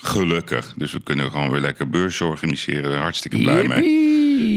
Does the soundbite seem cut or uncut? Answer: uncut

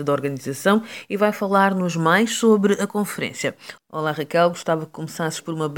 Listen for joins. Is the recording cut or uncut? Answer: uncut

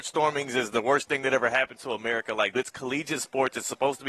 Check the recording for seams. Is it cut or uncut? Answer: cut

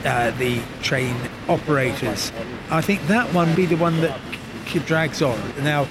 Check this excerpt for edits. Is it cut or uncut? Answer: cut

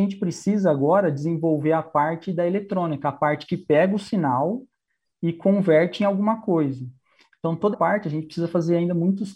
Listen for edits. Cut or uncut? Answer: cut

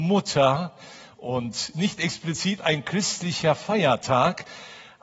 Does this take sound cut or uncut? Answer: cut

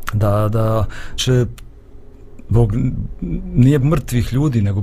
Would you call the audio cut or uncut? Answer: cut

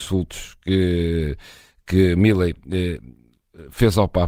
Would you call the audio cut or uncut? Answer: uncut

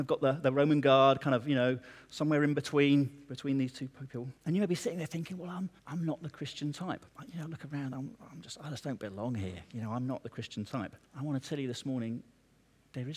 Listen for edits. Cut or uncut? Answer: cut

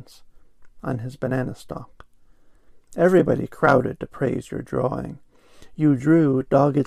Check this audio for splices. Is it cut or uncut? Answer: uncut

